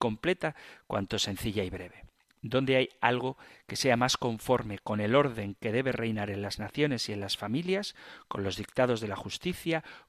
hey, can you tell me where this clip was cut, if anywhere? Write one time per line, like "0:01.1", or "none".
none

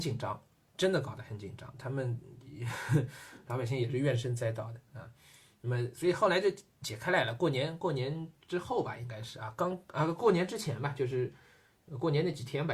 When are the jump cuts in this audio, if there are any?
none

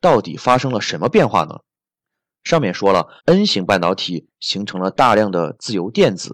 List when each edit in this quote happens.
0:03.2

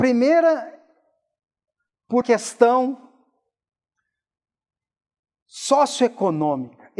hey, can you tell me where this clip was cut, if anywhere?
0:02.2

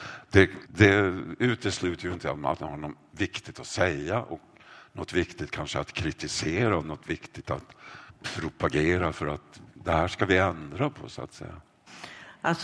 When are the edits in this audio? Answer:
none

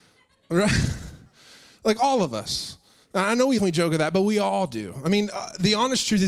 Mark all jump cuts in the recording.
0:03.6

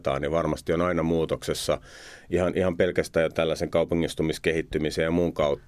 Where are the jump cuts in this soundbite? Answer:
none

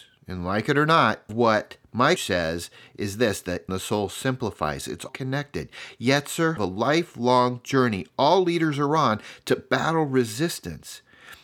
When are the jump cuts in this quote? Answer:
0:01.3
0:02.2
0:03.7
0:05.1
0:06.6

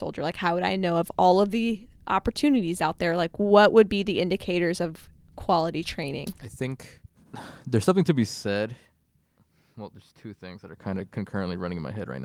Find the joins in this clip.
none

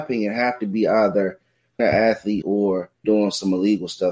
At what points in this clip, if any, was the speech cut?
0:01.8
0:02.4
0:03.0

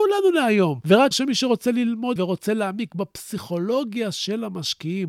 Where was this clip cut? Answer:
0:01.1
0:02.2

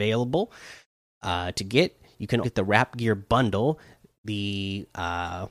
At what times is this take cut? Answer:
0:02.4

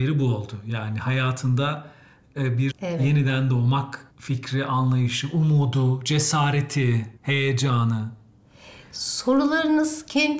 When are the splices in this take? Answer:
0:02.7
0:04.1
0:07.2

